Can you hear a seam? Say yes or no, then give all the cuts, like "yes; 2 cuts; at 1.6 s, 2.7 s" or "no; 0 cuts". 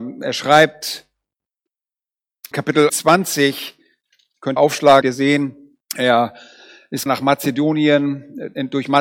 yes; 6 cuts; at 2.5 s, 2.9 s, 4.6 s, 5.0 s, 5.8 s, 7.1 s